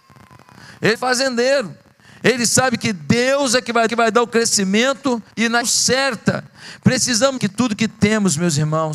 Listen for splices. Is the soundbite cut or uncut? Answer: cut